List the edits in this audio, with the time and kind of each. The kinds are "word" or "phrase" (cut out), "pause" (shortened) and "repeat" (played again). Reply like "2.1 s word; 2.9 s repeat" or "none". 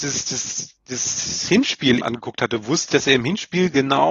2.0 s word; 2.9 s word